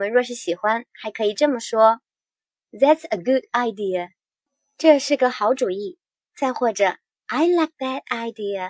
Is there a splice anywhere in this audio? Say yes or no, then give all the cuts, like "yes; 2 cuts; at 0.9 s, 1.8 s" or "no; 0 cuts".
no; 0 cuts